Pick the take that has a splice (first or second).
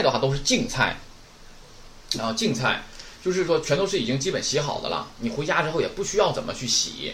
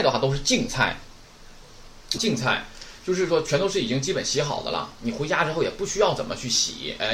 second